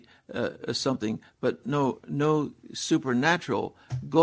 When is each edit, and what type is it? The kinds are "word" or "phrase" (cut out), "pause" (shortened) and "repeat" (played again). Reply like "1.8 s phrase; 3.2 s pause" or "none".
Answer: none